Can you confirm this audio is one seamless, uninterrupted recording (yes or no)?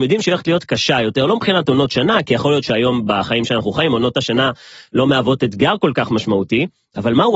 yes